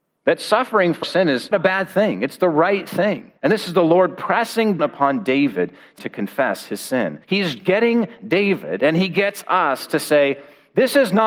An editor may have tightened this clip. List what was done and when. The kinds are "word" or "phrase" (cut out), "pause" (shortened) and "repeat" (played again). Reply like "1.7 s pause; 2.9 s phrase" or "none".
1.0 s word; 1.5 s word; 3.4 s pause; 4.8 s word; 6.0 s phrase; 7.2 s pause